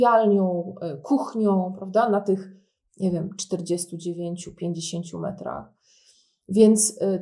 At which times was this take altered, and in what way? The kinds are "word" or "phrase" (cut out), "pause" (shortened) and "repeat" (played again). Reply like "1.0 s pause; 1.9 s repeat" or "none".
none